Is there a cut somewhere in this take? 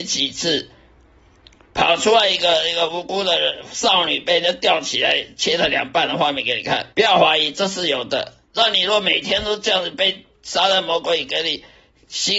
yes; 2 cuts; at 6.9 s, 8.4 s

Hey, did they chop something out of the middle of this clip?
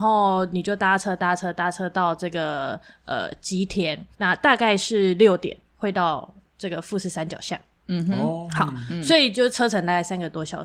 yes; 1 cut; at 4.1 s

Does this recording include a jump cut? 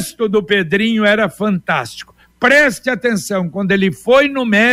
no; 0 cuts

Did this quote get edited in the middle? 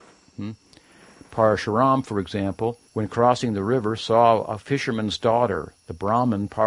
yes; 1 cut; at 2.9 s

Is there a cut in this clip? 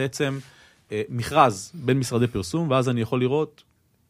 no; 0 cuts

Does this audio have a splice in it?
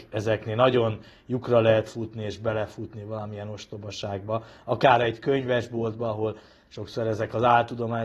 no; 0 cuts

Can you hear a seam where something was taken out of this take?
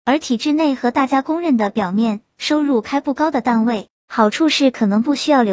no; 0 cuts

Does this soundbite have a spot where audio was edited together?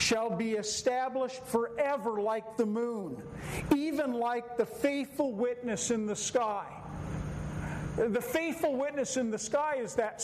no; 0 cuts

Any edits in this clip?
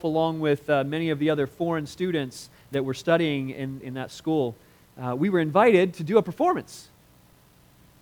yes; 1 cut; at 3.8 s

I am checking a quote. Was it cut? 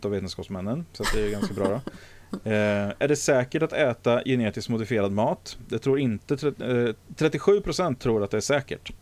no; 0 cuts

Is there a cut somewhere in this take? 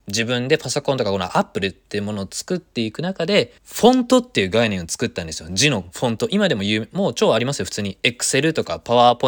yes; 1 cut; at 3.6 s

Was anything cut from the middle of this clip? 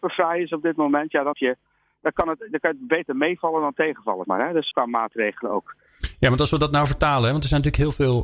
yes; 3 cuts; at 1.3 s, 4.2 s, 4.7 s

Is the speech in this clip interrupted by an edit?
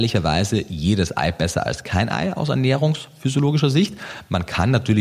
no; 0 cuts

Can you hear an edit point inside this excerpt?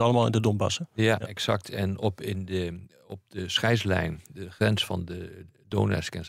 no; 0 cuts

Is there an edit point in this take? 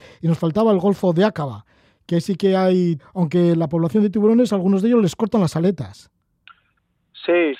yes; 1 cut; at 3.0 s

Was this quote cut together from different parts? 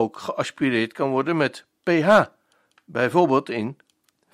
no; 0 cuts

